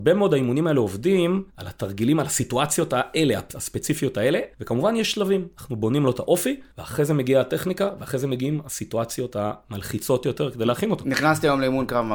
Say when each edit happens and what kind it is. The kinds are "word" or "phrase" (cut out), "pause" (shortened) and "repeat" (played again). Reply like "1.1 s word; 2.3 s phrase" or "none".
1.5 s pause; 4.5 s pause; 6.7 s pause